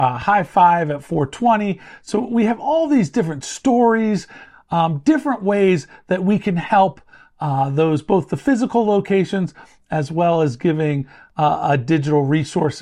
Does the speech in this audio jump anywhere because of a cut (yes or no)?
no